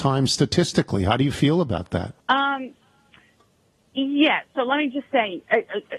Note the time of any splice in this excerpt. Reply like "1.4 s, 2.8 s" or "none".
2.2 s